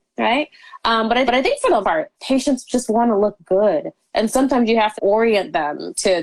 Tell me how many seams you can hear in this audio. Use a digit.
4